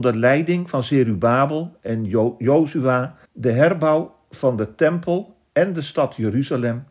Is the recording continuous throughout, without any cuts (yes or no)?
no